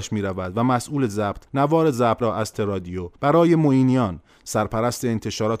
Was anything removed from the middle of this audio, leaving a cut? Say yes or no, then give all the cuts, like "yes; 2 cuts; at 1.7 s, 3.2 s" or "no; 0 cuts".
yes; 4 cuts; at 1.5 s, 2.2 s, 2.5 s, 3.2 s